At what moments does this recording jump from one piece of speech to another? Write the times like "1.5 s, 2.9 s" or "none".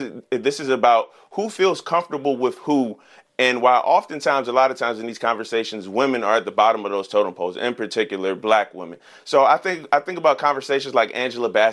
none